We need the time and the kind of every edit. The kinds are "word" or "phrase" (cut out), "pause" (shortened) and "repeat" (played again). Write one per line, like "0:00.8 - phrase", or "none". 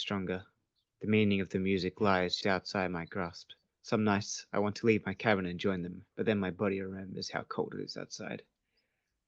0:02.4 - word
0:03.7 - pause
0:06.1 - pause